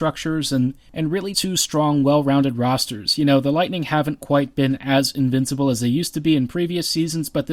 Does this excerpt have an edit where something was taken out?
yes; 1 cut; at 1.3 s

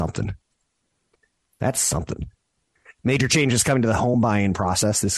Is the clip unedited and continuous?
yes; 0 cuts

